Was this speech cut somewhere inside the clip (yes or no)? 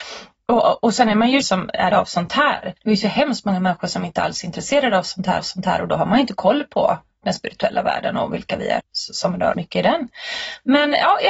yes